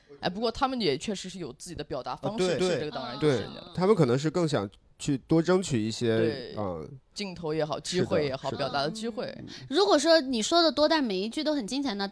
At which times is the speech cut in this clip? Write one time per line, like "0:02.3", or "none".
0:02.6